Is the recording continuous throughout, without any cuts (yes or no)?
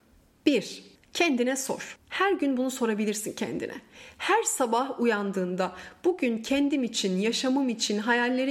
yes